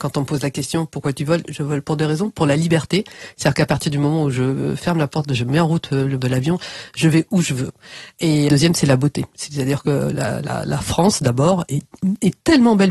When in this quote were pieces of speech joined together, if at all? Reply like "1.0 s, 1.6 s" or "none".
6.2 s, 8.5 s